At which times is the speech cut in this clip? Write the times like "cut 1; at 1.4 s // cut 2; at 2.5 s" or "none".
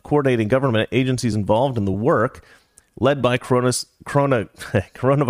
none

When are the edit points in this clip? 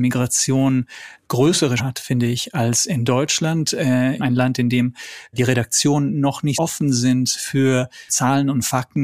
cut 1; at 1.8 s // cut 2; at 6.5 s // cut 3; at 8.1 s

